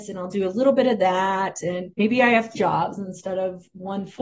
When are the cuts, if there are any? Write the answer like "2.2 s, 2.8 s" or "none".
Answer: 1.9 s, 2.5 s

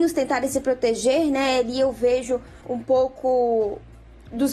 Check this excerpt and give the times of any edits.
2.6 s

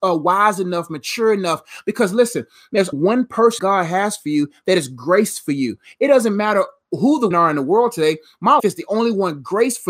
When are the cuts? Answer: 2.9 s, 3.6 s, 7.3 s, 8.6 s

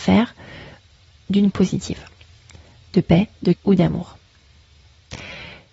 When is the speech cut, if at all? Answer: 1.5 s, 3.5 s

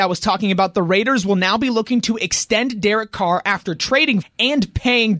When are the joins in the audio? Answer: 4.2 s

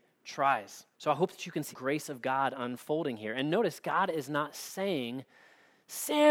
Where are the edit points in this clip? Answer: 0.9 s, 1.7 s

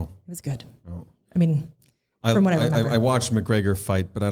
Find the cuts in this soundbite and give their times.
none

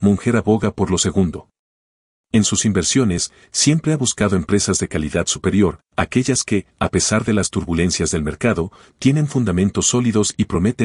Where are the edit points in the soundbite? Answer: none

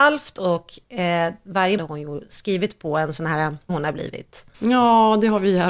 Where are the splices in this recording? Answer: 1.8 s, 3.7 s, 4.5 s

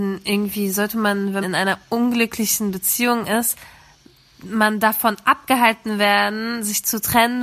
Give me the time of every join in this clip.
1.4 s

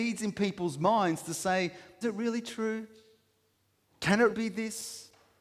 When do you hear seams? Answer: 2.0 s, 4.3 s

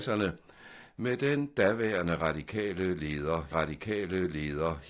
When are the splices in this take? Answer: 3.5 s

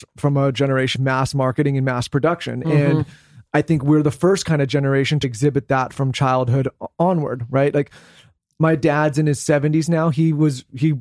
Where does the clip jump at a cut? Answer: 1.0 s, 5.2 s

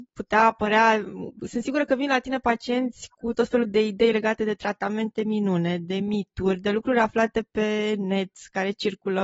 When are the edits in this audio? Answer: none

